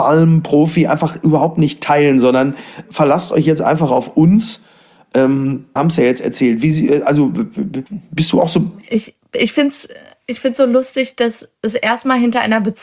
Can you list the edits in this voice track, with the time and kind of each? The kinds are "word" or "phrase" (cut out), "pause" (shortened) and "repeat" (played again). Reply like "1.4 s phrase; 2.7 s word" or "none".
2.8 s word; 5.8 s word; 7.9 s pause